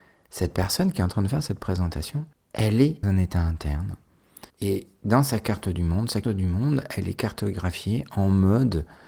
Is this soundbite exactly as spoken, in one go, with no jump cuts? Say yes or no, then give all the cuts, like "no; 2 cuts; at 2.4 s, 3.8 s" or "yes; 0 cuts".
no; 4 cuts; at 2.3 s, 3.0 s, 4.5 s, 6.2 s